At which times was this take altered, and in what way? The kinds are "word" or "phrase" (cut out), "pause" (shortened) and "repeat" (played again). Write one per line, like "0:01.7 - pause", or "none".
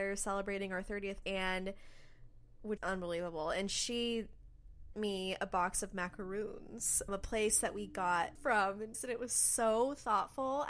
0:01.2 - word
0:02.8 - word
0:04.9 - word
0:07.1 - word
0:08.4 - word
0:08.9 - word